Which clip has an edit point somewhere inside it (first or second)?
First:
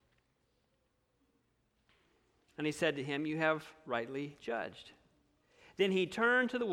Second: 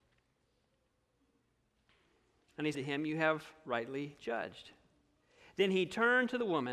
second